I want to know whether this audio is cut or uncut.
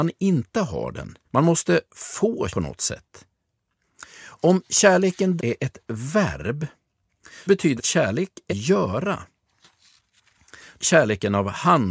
cut